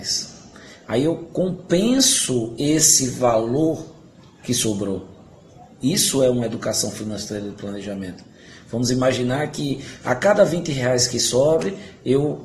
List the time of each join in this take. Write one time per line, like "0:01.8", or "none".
none